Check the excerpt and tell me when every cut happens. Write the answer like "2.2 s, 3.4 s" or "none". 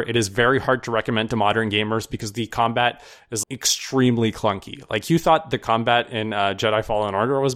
3.4 s